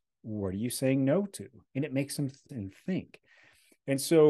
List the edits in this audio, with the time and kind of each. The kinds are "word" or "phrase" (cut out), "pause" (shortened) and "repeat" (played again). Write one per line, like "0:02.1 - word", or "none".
0:02.5 - word